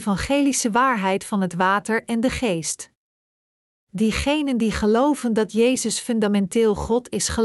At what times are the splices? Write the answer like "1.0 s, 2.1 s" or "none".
none

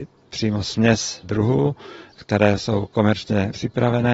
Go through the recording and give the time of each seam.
2.6 s

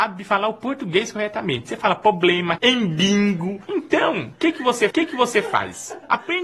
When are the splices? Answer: 2.6 s, 4.9 s

